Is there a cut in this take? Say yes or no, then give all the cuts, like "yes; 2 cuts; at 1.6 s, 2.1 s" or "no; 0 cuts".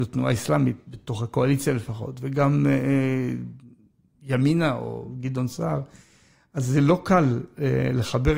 no; 0 cuts